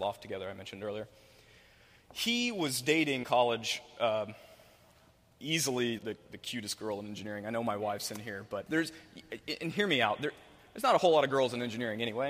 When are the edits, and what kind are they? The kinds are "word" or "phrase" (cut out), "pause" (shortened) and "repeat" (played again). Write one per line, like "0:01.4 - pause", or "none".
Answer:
0:03.2 - word
0:06.0 - word
0:08.7 - word